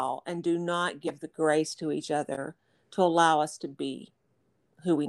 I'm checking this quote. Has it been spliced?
no; 0 cuts

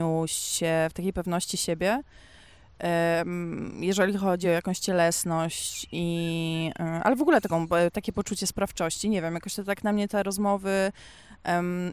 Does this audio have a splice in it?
no; 0 cuts

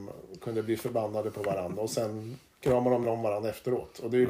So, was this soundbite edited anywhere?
yes; 2 cuts; at 2.5 s, 3.0 s

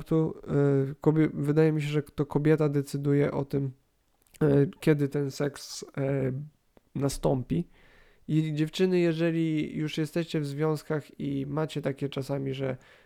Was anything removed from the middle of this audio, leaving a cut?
no; 0 cuts

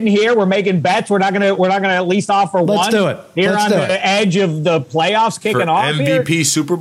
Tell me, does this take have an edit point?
no; 0 cuts

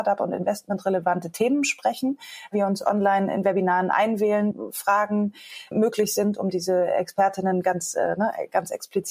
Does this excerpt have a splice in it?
no; 0 cuts

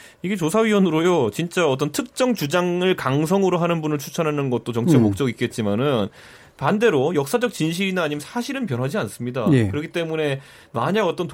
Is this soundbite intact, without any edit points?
yes; 0 cuts

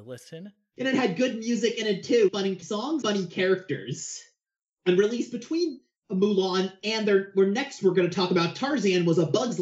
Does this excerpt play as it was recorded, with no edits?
no; 3 cuts; at 2.3 s, 2.6 s, 3.0 s

